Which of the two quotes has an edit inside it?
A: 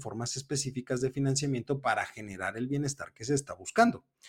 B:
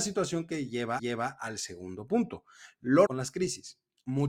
B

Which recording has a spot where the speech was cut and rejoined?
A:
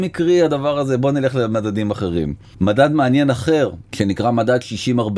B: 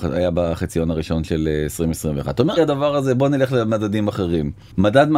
B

